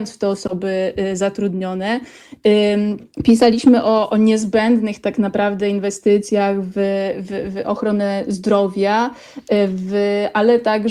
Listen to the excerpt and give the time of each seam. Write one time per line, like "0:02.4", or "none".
0:03.1

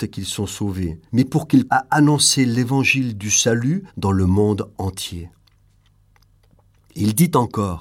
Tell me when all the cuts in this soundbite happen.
0:01.1
0:01.7
0:03.9

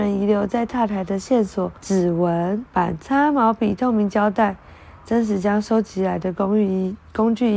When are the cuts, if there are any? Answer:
0:01.8
0:02.7

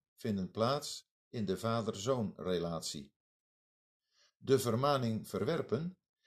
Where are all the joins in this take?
none

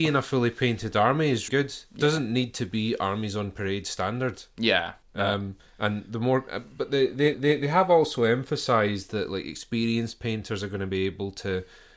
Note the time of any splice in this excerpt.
0:01.5
0:05.0
0:05.7
0:07.3

